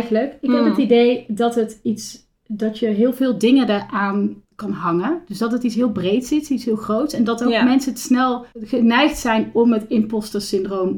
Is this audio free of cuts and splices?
no; 2 cuts; at 4.4 s, 8.5 s

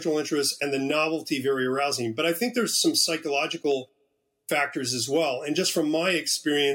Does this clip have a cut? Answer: no; 0 cuts

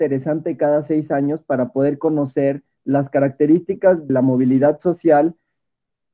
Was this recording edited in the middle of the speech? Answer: yes; 1 cut; at 4.1 s

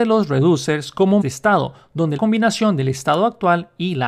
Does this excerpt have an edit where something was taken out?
yes; 2 cuts; at 1.2 s, 2.2 s

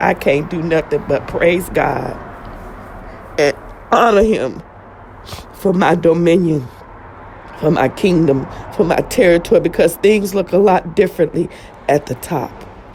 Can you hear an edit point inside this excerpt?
no; 0 cuts

